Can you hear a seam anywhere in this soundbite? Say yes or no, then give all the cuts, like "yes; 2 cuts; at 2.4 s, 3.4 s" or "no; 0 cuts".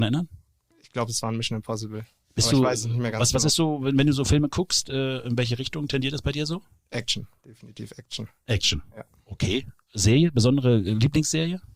no; 0 cuts